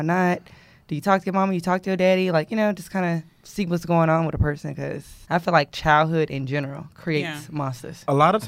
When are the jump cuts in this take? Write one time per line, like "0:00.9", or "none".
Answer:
0:05.2